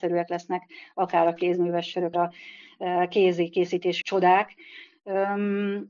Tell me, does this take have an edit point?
yes; 2 cuts; at 2.1 s, 4.0 s

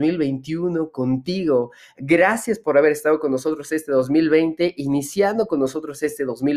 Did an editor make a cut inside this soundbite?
no; 0 cuts

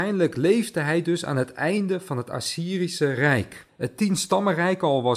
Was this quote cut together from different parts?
yes; 1 cut; at 3.7 s

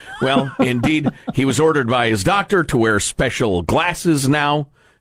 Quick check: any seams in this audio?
no; 0 cuts

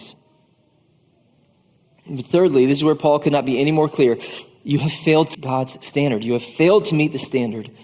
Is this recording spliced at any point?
yes; 1 cut; at 5.3 s

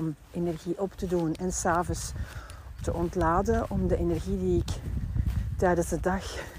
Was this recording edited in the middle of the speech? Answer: yes; 1 cut; at 2.8 s

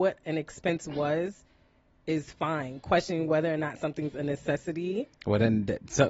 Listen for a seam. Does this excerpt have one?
no; 0 cuts

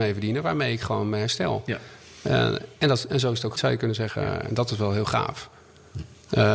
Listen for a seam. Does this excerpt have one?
yes; 1 cut; at 3.5 s

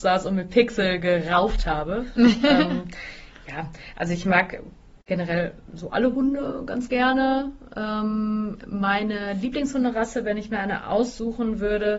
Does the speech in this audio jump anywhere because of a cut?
no; 0 cuts

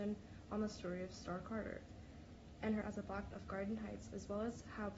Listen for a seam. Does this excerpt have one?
yes; 2 cuts; at 2.8 s, 3.3 s

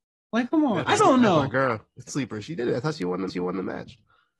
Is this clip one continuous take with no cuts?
no; 3 cuts; at 1.0 s, 2.1 s, 3.3 s

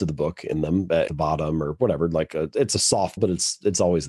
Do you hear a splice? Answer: yes; 2 cuts; at 1.1 s, 3.2 s

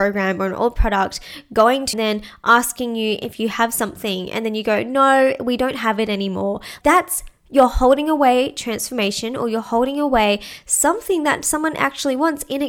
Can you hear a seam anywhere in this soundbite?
yes; 2 cuts; at 1.9 s, 6.8 s

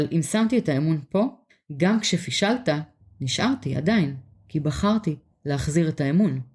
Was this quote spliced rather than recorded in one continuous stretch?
no; 0 cuts

